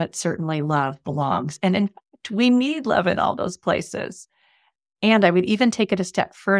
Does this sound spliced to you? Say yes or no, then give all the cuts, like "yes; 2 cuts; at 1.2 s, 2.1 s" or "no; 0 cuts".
no; 0 cuts